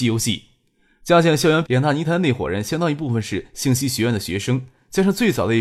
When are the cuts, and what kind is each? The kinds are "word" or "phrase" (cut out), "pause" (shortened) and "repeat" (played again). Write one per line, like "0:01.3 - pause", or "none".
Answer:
0:01.6 - phrase